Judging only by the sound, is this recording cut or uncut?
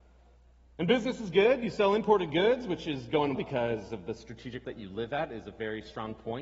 cut